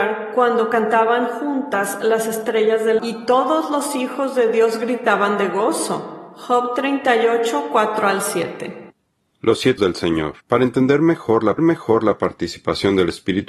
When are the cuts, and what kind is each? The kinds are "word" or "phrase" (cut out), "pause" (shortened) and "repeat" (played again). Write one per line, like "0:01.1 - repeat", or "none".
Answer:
0:03.0 - word
0:09.8 - word
0:10.4 - pause
0:11.6 - repeat